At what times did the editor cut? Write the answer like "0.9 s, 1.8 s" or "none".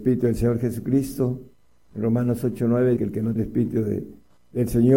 3.0 s, 3.4 s